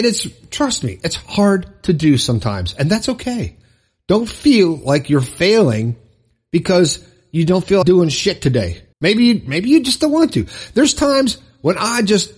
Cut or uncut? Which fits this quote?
cut